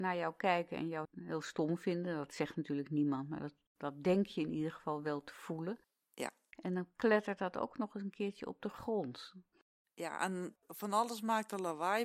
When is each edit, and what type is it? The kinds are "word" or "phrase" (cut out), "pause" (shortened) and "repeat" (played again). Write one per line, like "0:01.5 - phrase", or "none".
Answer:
0:01.0 - word